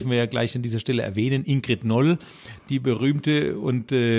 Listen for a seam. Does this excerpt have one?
no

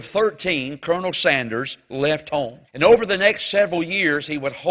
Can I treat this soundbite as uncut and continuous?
no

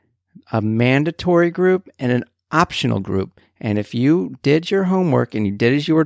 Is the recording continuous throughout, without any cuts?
yes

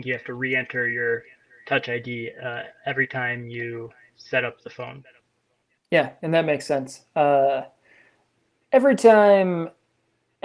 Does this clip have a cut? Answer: no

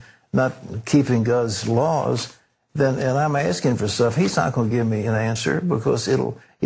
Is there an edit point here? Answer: no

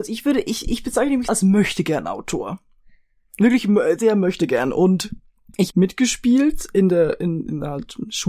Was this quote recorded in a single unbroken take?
no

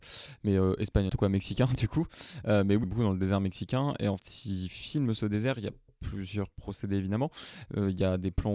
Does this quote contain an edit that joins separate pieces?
yes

